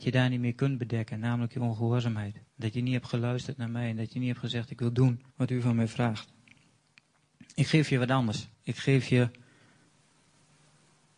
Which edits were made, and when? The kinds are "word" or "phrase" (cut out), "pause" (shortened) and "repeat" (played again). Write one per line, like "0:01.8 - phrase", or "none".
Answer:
0:02.5 - pause
0:05.3 - pause
0:08.5 - pause